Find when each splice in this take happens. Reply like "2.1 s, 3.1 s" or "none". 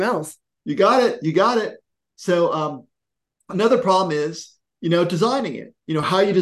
none